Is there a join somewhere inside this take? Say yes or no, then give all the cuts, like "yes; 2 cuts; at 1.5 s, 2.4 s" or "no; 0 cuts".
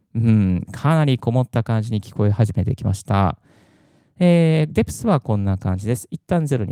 no; 0 cuts